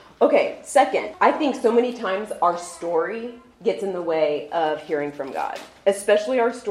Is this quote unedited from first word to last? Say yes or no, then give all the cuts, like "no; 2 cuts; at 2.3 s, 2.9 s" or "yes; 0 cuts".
yes; 0 cuts